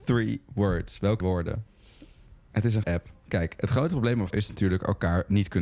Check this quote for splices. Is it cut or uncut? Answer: cut